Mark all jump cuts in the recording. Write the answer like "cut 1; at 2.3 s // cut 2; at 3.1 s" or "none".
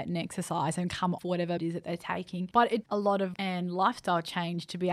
cut 1; at 1.2 s // cut 2; at 1.6 s // cut 3; at 2.8 s // cut 4; at 3.3 s